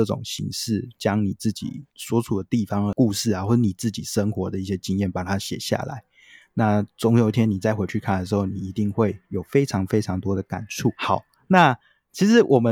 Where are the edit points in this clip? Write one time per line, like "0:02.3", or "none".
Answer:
0:09.2